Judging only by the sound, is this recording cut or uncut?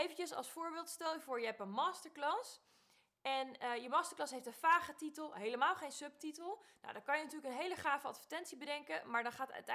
uncut